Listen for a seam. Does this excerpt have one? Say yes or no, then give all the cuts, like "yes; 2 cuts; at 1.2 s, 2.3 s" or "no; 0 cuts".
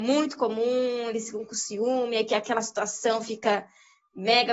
no; 0 cuts